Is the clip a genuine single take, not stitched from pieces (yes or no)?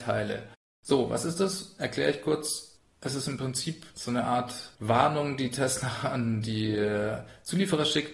yes